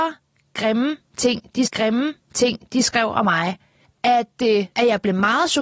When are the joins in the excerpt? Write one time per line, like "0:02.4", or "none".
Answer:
0:01.6
0:03.8
0:04.7